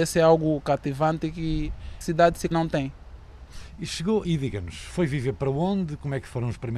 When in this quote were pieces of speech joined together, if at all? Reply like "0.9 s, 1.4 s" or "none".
2.0 s, 2.5 s, 4.2 s